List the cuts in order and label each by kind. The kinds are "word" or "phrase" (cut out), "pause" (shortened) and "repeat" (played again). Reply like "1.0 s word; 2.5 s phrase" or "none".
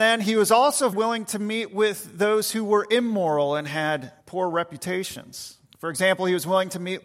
0.9 s word; 4.2 s pause; 5.6 s pause